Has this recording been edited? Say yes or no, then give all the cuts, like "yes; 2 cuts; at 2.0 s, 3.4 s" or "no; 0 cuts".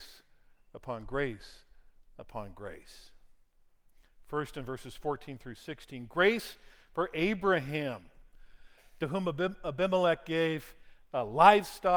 no; 0 cuts